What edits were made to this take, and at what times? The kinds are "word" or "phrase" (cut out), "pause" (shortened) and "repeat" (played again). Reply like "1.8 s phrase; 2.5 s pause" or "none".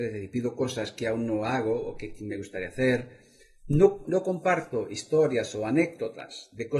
4.0 s word